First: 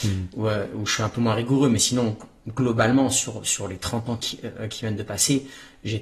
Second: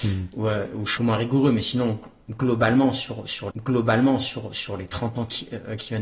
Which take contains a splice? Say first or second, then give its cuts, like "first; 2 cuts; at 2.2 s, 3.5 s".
second; 2 cuts; at 1.0 s, 3.5 s